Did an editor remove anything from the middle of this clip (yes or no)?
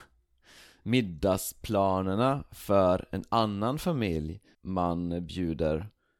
yes